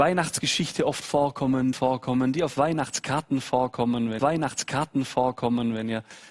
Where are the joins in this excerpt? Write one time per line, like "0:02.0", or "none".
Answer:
0:01.7
0:04.2